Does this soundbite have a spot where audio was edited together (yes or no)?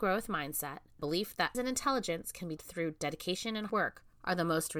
yes